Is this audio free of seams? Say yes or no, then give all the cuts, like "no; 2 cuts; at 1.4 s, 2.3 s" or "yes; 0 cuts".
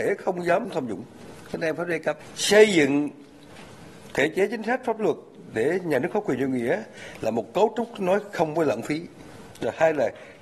yes; 0 cuts